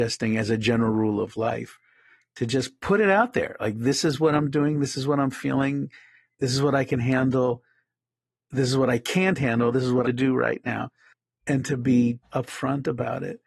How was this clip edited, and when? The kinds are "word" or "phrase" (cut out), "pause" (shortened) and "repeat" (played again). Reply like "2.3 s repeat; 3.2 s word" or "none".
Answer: 10.0 s phrase; 12.2 s word